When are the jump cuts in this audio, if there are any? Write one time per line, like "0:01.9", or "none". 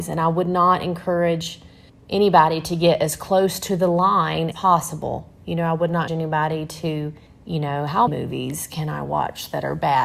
0:01.9
0:04.5
0:06.1
0:07.3
0:08.1